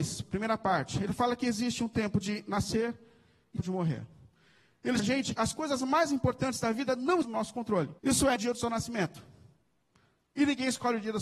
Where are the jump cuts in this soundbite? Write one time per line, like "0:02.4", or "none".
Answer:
0:03.6
0:05.0
0:05.4
0:07.2
0:08.0
0:08.4